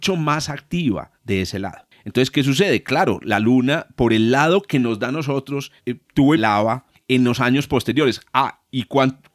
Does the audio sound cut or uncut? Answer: cut